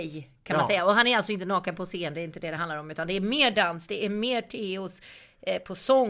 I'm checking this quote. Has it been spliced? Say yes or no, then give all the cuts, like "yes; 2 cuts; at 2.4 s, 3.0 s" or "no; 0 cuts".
no; 0 cuts